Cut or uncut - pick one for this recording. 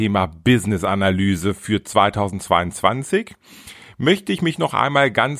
uncut